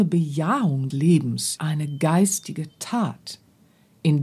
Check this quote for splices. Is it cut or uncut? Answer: cut